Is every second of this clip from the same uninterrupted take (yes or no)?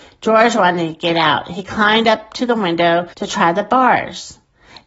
no